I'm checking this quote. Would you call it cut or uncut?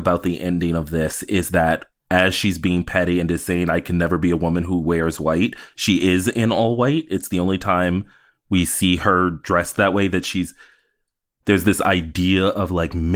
uncut